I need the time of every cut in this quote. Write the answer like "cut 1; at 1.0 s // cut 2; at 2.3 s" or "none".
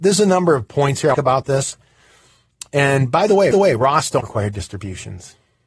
cut 1; at 1.1 s // cut 2; at 3.5 s // cut 3; at 4.2 s

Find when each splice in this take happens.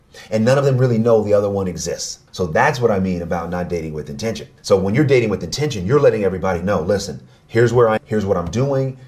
cut 1; at 2.3 s // cut 2; at 4.6 s // cut 3; at 8.0 s

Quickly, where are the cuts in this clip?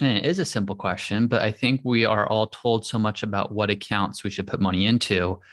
none

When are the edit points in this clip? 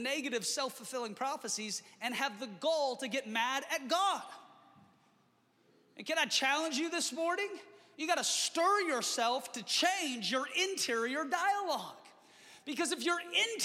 none

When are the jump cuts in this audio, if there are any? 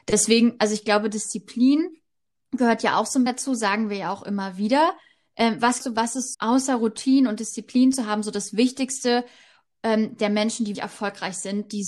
cut 1; at 3.3 s // cut 2; at 5.8 s // cut 3; at 6.3 s // cut 4; at 10.7 s

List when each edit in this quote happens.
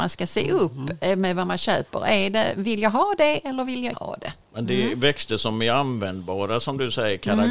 cut 1; at 3.9 s // cut 2; at 4.4 s

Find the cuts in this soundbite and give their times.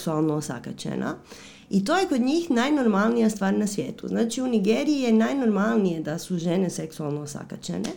none

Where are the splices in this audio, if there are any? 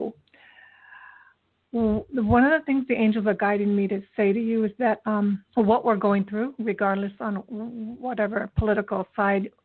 cut 1; at 5.5 s

